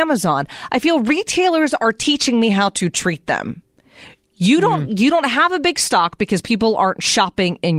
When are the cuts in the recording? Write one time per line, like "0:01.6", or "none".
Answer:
none